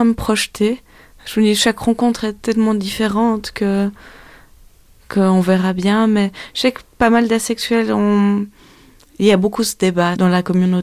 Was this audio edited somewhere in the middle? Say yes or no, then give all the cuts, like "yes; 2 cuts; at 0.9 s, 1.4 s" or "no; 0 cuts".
no; 0 cuts